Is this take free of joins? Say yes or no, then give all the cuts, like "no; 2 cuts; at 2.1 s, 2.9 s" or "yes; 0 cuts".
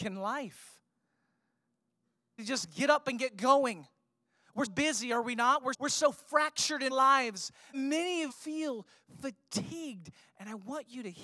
no; 6 cuts; at 2.4 s, 4.7 s, 5.7 s, 6.9 s, 7.7 s, 8.3 s